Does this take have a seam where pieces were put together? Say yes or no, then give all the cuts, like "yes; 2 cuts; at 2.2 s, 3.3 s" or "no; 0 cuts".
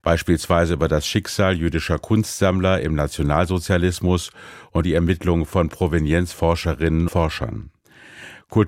yes; 2 cuts; at 4.8 s, 7.1 s